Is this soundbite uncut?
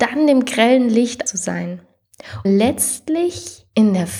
no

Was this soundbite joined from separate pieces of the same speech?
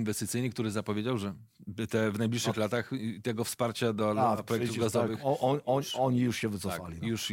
no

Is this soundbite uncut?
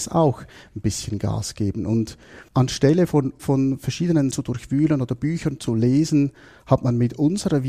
no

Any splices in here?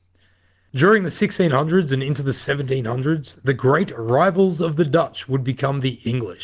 no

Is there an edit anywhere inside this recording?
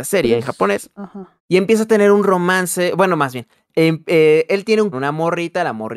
yes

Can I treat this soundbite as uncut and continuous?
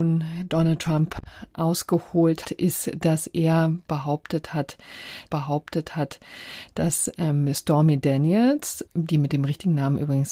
no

